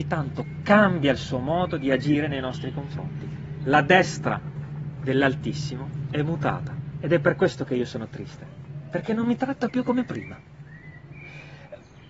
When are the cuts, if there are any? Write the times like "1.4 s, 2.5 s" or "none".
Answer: none